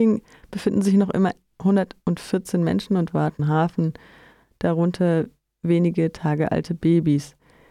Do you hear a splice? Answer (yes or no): yes